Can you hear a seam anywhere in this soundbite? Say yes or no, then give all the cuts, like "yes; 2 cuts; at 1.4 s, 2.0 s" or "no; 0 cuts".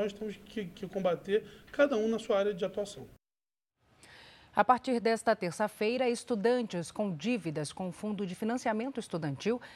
no; 0 cuts